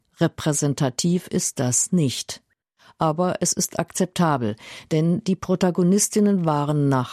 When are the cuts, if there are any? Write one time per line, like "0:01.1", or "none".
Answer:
none